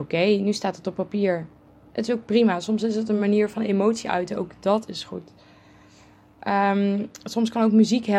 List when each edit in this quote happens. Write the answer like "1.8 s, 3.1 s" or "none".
none